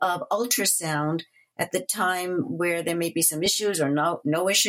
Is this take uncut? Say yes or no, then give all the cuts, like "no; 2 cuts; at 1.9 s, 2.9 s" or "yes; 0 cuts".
yes; 0 cuts